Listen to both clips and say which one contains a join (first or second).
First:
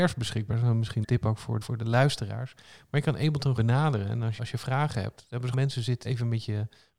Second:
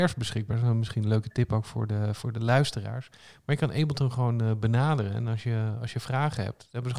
first